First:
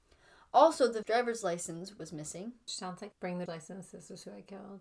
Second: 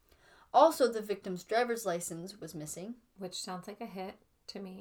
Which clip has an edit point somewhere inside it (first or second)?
first